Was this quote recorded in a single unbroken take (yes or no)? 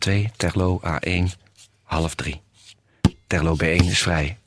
yes